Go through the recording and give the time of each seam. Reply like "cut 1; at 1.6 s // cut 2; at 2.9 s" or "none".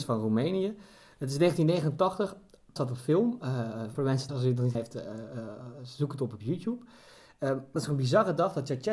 cut 1; at 2.8 s // cut 2; at 3.9 s // cut 3; at 4.3 s // cut 4; at 4.7 s // cut 5; at 7.8 s